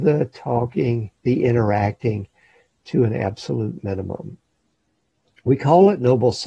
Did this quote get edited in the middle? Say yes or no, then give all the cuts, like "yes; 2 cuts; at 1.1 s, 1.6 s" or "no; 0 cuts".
no; 0 cuts